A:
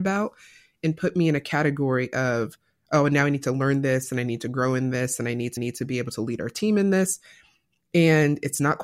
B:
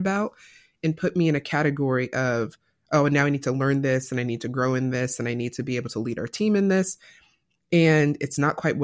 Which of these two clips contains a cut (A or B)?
A